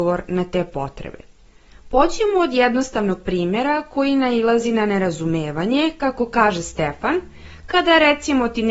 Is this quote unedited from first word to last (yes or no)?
yes